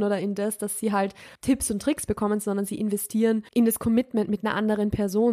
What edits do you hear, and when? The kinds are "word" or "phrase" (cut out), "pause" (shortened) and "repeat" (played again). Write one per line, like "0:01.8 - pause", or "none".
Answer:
0:01.4 - pause
0:03.5 - pause